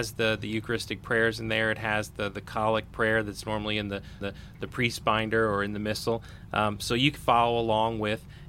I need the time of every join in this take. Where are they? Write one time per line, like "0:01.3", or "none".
0:04.2
0:07.2